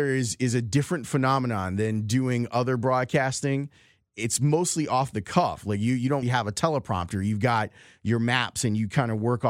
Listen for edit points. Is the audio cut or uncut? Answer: cut